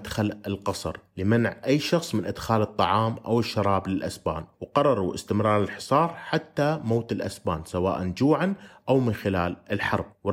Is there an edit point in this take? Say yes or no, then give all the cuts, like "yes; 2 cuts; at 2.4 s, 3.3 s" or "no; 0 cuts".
yes; 1 cut; at 4.5 s